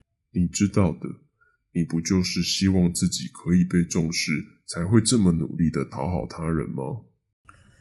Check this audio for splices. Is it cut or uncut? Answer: uncut